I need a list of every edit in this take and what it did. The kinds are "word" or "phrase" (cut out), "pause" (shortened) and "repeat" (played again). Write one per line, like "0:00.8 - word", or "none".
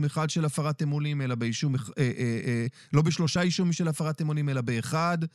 none